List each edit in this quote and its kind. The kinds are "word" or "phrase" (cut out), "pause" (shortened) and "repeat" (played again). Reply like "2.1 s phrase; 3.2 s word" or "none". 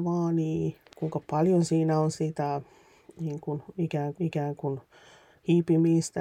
2.1 s word; 4.1 s repeat